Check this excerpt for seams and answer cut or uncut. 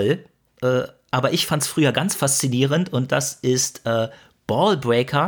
uncut